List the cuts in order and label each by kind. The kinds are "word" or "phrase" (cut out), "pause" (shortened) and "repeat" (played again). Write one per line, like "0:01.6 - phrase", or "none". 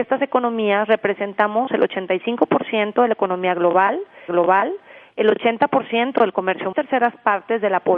0:04.3 - repeat
0:06.7 - phrase